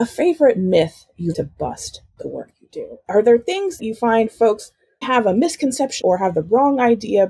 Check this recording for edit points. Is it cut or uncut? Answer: cut